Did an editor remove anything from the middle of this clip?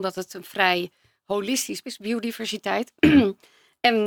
yes; 1 cut; at 1.8 s

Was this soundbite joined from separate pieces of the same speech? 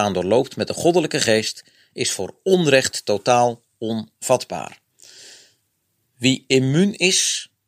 no; 0 cuts

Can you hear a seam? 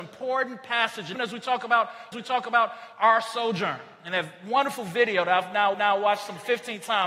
yes; 3 cuts; at 1.1 s, 2.1 s, 5.7 s

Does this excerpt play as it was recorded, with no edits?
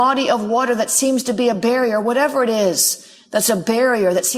yes; 0 cuts

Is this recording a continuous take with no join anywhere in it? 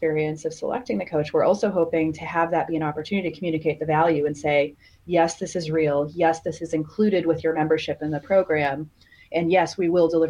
yes; 0 cuts

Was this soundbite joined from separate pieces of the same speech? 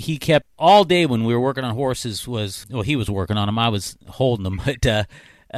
no; 0 cuts

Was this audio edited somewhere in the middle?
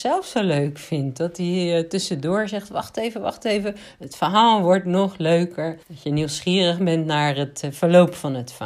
yes; 1 cut; at 5.8 s

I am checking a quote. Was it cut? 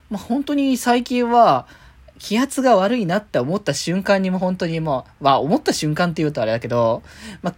no; 0 cuts

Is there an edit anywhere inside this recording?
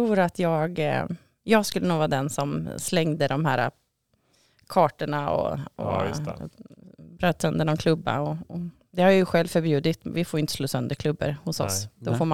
no; 0 cuts

